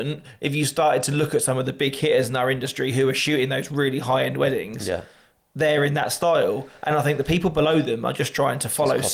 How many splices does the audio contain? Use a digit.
0